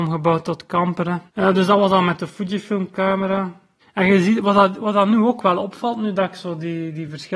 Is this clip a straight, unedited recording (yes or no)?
no